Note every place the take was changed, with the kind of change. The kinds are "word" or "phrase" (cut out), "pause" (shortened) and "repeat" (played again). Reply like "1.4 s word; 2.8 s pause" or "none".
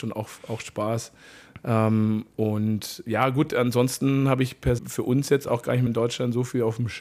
4.8 s word; 5.9 s word

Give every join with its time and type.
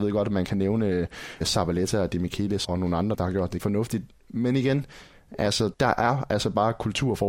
1.4 s word; 2.6 s word; 3.1 s word; 3.6 s word; 5.7 s word

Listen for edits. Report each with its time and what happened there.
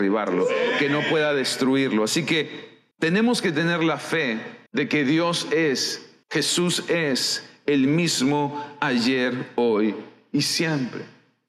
2.9 s pause; 4.7 s pause; 6.2 s pause

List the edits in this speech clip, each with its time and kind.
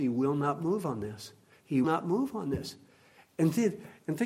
1.8 s word

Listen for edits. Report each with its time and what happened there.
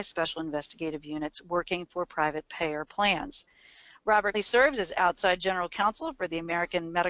4.3 s word

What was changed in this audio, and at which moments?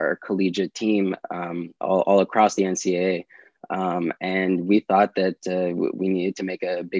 1.8 s pause

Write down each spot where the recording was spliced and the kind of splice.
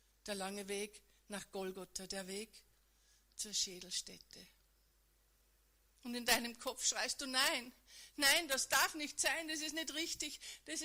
none

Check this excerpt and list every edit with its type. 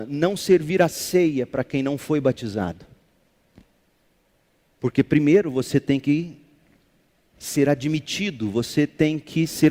none

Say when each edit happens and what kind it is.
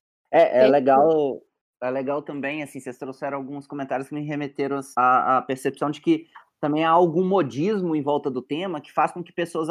4.9 s pause

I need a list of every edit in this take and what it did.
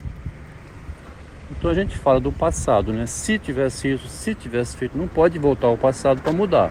4.9 s word

